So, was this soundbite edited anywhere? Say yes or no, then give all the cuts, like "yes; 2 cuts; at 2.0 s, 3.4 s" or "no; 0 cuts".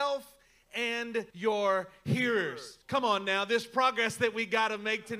yes; 2 cuts; at 1.3 s, 2.8 s